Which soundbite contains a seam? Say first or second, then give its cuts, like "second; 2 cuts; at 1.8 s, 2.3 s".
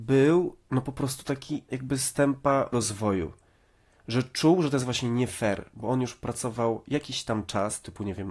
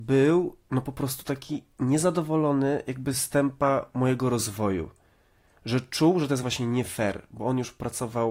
first; 2 cuts; at 1.7 s, 2.7 s